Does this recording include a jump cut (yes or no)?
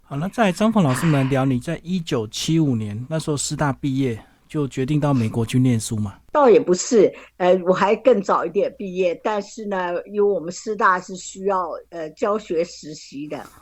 yes